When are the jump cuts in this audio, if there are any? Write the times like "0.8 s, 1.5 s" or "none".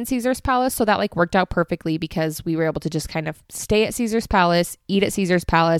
3.5 s